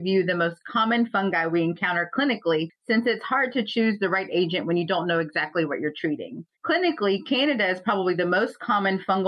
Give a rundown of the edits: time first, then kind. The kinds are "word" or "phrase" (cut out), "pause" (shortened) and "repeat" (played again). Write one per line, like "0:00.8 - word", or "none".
0:06.5 - pause